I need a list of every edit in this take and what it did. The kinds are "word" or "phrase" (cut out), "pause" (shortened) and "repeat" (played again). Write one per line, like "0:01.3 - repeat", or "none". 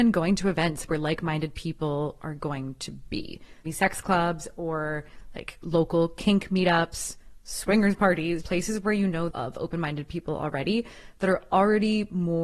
0:03.6 - phrase
0:08.4 - word
0:09.3 - phrase